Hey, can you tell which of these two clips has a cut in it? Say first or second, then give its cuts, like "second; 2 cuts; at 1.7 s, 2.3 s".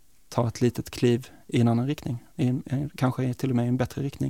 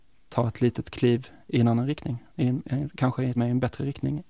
second; 1 cut; at 3.4 s